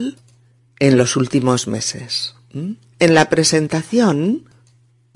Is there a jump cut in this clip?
no; 0 cuts

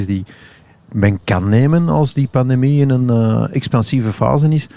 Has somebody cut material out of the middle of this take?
no; 0 cuts

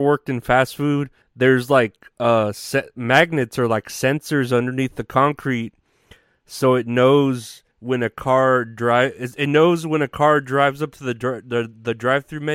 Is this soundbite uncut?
no; 2 cuts; at 1.2 s, 7.7 s

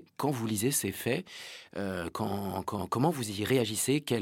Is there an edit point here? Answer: no; 0 cuts

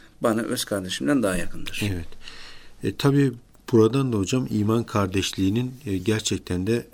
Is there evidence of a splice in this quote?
no; 0 cuts

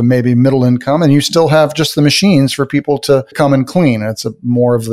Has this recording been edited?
no; 0 cuts

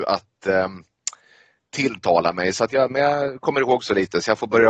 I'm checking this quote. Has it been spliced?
no; 0 cuts

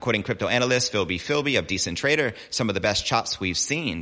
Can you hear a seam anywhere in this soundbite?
no; 0 cuts

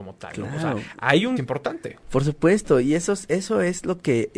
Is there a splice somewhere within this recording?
yes; 1 cut; at 1.4 s

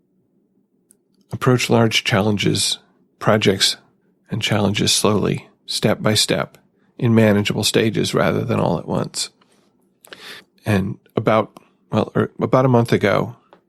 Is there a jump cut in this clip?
no; 0 cuts

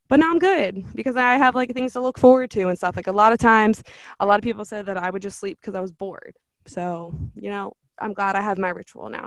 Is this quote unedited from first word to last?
yes; 0 cuts

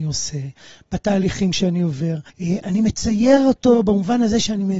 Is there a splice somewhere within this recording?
yes; 1 cut; at 2.3 s

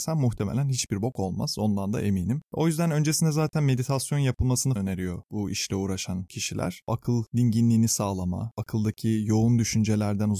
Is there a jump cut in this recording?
yes; 1 cut; at 4.8 s

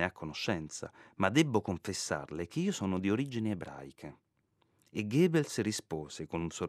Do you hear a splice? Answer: no; 0 cuts

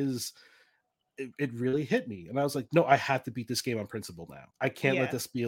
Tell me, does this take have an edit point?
yes; 1 cut; at 4.5 s

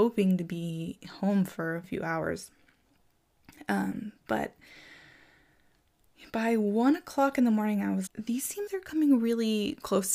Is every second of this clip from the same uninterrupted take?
no; 3 cuts; at 1.8 s, 8.1 s, 8.7 s

